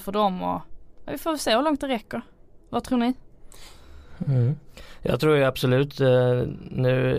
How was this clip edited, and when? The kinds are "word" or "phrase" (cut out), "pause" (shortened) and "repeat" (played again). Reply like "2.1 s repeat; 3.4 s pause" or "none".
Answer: none